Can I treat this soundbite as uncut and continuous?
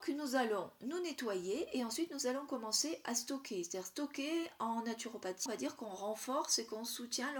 no; 1 cut; at 5.5 s

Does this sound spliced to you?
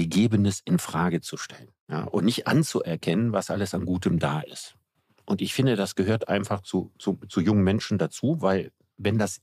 no; 0 cuts

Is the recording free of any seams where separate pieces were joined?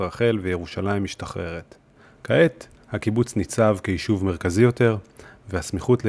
yes; 0 cuts

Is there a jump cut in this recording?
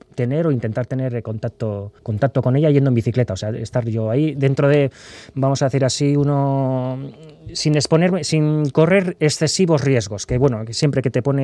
yes; 1 cut; at 2.0 s

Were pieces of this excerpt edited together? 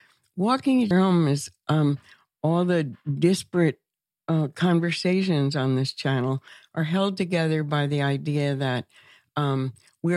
yes; 1 cut; at 0.9 s

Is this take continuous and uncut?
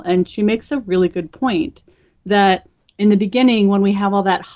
yes; 0 cuts

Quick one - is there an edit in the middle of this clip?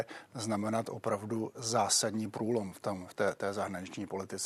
no; 0 cuts

